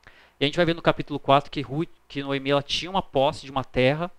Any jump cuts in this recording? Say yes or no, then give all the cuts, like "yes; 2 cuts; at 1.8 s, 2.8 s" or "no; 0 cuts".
no; 0 cuts